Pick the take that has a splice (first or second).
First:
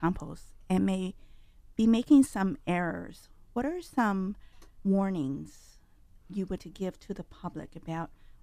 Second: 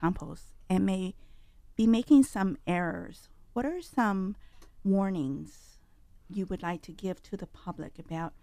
first